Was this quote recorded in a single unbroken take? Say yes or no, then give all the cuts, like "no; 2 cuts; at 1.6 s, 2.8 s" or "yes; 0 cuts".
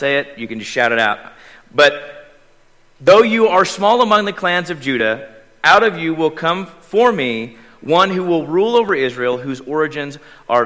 yes; 0 cuts